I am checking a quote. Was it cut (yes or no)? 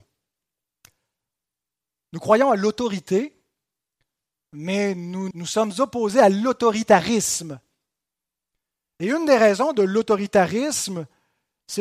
yes